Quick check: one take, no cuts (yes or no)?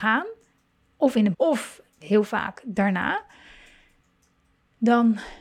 no